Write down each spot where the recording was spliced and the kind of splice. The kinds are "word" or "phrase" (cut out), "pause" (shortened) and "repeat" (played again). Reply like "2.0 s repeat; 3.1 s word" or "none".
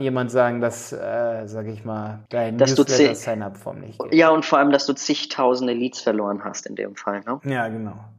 2.3 s pause